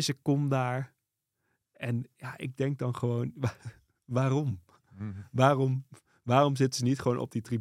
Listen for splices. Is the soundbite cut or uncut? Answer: uncut